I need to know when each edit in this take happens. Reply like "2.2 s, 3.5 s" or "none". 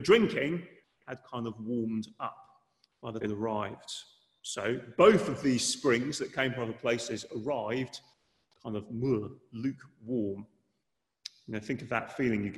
3.2 s